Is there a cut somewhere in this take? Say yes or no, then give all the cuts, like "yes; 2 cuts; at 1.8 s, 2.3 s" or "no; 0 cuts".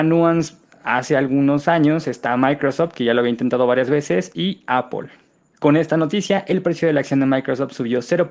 no; 0 cuts